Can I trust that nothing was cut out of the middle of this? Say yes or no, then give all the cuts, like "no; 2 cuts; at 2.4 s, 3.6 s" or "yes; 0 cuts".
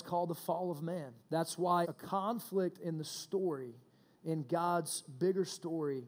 no; 2 cuts; at 1.2 s, 1.8 s